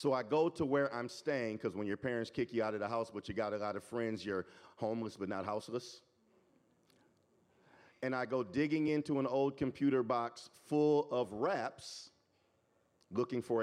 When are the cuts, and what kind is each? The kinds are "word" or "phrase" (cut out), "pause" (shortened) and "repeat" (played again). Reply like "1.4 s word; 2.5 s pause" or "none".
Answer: none